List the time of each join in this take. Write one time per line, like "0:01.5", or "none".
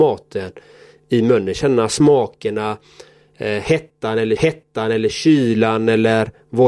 0:04.4

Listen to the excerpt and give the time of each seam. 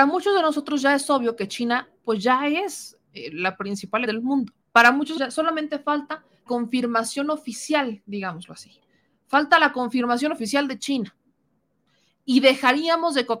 0:04.1
0:04.6
0:05.2
0:06.5

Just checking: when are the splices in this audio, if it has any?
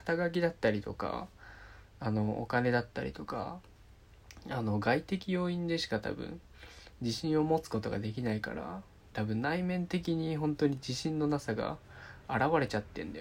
none

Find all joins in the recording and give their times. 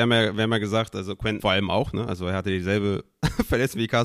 0:01.4

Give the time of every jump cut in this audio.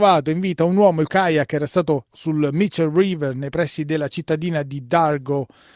0:01.1
0:02.1

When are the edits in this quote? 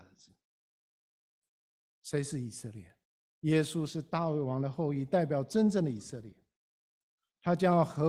0:03.0

